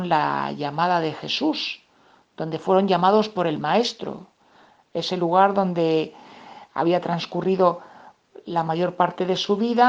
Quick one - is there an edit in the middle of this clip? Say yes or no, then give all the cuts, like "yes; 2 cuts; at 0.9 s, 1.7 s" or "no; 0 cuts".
no; 0 cuts